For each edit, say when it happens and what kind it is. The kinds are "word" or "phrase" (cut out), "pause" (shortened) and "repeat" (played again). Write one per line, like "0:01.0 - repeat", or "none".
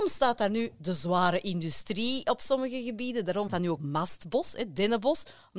0:03.5 - word
0:03.8 - word